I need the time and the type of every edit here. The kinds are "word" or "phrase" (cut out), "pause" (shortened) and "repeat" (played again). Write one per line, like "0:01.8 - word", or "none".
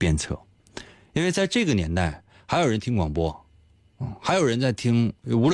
none